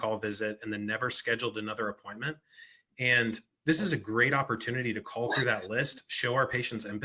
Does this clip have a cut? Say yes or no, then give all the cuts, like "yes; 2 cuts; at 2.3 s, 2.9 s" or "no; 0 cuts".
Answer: no; 0 cuts